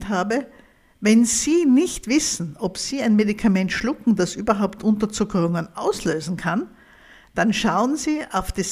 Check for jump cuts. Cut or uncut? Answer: uncut